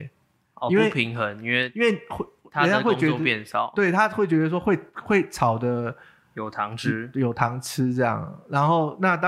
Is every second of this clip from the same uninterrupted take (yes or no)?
yes